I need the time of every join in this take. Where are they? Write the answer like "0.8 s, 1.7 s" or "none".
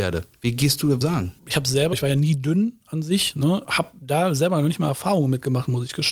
1.0 s, 1.4 s, 1.9 s